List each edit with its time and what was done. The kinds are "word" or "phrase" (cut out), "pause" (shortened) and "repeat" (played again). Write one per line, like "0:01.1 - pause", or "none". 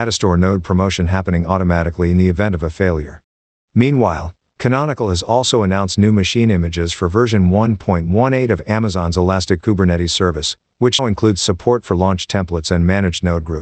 0:11.0 - word